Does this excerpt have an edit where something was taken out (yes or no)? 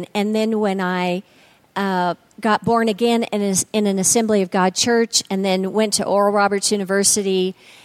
no